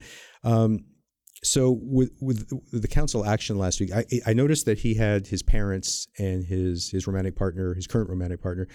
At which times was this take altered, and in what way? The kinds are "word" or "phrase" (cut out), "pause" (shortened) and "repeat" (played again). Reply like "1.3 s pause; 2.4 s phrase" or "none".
none